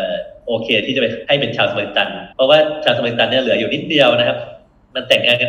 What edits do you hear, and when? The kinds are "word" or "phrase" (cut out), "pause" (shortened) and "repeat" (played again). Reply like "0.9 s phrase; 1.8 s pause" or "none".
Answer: 2.3 s pause